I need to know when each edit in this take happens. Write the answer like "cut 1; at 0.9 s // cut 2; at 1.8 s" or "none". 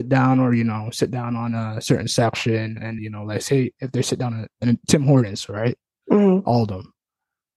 cut 1; at 3.0 s